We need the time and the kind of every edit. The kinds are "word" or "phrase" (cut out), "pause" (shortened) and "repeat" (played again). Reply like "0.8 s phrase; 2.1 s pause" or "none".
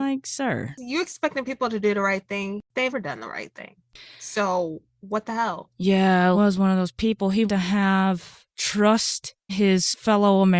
2.9 s word; 6.3 s word; 7.5 s word; 9.5 s word